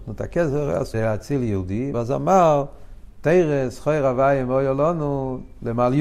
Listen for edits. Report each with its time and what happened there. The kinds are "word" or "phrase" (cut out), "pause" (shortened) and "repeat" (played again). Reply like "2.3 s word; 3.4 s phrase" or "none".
0.9 s phrase; 1.9 s phrase